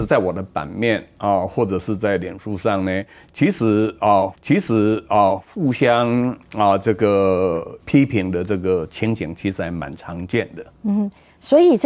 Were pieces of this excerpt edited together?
yes; 3 cuts; at 4.4 s, 7.8 s, 10.7 s

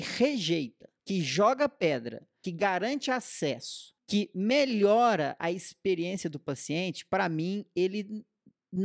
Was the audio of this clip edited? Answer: yes; 3 cuts; at 1.0 s, 2.4 s, 4.0 s

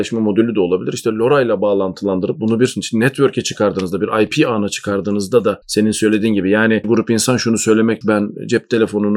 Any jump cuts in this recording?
yes; 2 cuts; at 6.8 s, 8.0 s

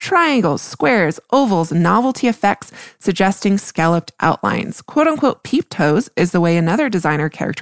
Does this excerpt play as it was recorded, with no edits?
yes; 0 cuts

